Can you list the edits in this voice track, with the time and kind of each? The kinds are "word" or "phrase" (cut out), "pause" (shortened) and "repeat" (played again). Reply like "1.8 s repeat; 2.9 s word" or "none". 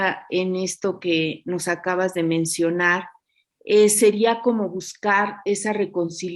none